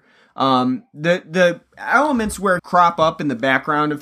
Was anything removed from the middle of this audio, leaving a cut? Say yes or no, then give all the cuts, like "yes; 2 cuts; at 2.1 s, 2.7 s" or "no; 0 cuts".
yes; 1 cut; at 2.6 s